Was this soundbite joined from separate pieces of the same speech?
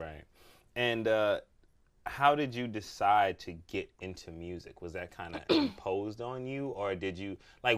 no; 0 cuts

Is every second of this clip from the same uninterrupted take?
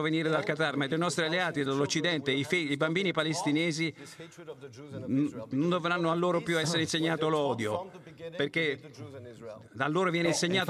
yes; 0 cuts

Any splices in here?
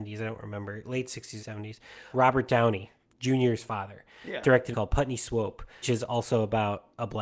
yes; 5 cuts; at 1.4 s, 2.1 s, 3.1 s, 4.7 s, 5.8 s

